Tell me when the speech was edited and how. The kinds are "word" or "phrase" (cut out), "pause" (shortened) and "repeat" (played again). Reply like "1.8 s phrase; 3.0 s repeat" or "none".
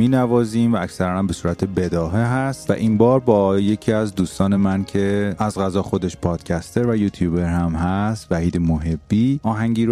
none